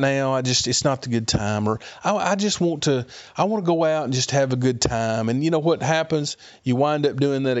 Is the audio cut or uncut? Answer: uncut